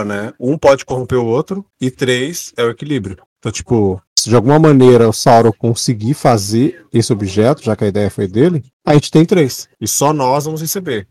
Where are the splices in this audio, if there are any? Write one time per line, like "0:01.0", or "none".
0:01.7
0:03.3
0:04.1
0:08.7